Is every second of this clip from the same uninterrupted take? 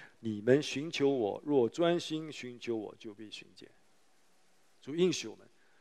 yes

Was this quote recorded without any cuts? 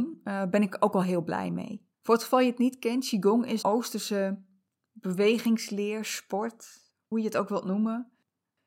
no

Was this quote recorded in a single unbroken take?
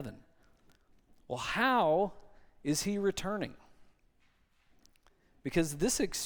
yes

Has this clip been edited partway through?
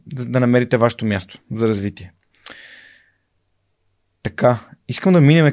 no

